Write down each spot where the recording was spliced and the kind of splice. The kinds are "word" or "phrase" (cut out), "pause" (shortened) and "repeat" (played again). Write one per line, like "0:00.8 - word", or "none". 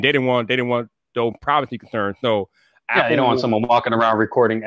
none